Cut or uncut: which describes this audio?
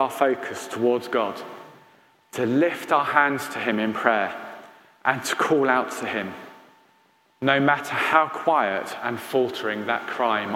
uncut